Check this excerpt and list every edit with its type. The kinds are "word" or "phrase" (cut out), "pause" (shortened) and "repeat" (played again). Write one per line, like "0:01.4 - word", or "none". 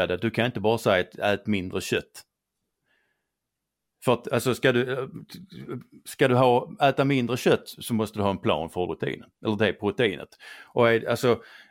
0:08.9 - phrase
0:09.3 - pause

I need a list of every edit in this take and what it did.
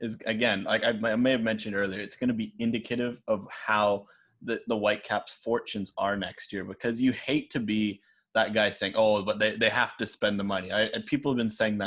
none

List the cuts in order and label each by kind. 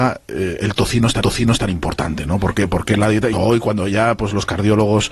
0:01.2 - repeat
0:03.3 - word

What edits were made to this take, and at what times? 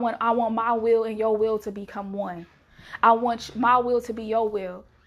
none

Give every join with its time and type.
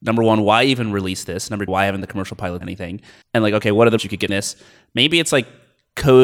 0:01.7 - word
0:02.6 - word
0:03.2 - pause
0:04.0 - word
0:04.3 - phrase

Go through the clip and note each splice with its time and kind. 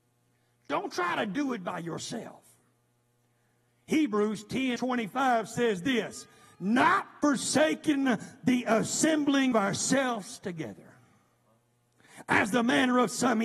0:04.8 - word
0:09.5 - word

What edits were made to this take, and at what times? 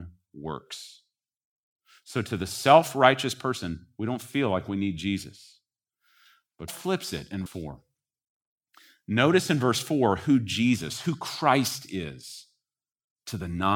0:06.7 - word
0:07.5 - word

